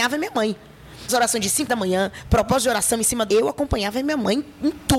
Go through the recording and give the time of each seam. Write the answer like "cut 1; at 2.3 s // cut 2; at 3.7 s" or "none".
cut 1; at 1.1 s // cut 2; at 1.7 s // cut 3; at 3.3 s